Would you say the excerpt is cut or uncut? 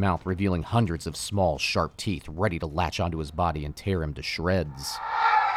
uncut